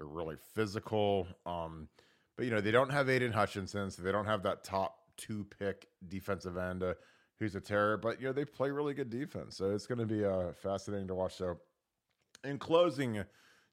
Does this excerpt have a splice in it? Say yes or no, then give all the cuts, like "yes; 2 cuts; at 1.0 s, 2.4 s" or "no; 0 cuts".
no; 0 cuts